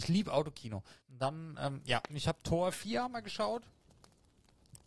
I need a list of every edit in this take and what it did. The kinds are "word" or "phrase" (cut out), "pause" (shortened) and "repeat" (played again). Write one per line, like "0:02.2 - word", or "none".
0:01.0 - pause